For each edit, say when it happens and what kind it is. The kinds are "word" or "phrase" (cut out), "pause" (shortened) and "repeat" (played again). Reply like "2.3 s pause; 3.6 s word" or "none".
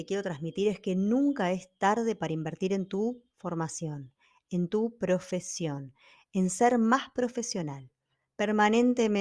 none